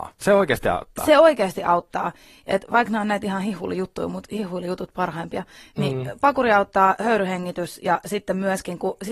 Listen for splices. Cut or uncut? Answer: uncut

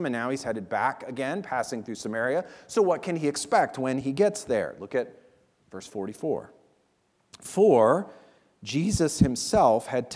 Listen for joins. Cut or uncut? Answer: uncut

